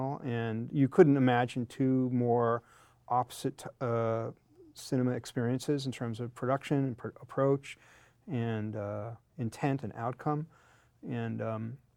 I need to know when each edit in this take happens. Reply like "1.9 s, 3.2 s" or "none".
none

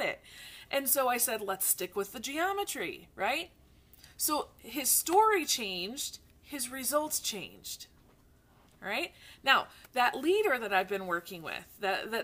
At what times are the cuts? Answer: none

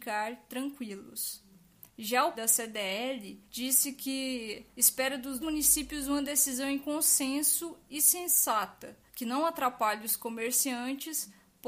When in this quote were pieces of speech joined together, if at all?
1.9 s, 2.3 s, 3.4 s, 4.7 s, 5.4 s, 9.1 s

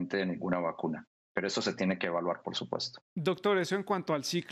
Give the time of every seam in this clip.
3.0 s

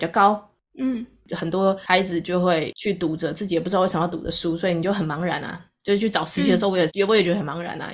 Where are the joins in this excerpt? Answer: 6.9 s

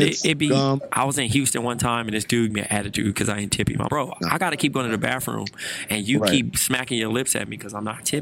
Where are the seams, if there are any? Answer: 2.5 s, 3.9 s

